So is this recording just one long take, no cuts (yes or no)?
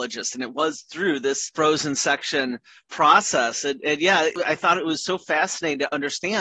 yes